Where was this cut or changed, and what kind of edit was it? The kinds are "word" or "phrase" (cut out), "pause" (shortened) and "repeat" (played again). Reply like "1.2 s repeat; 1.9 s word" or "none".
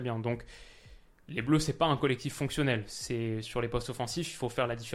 none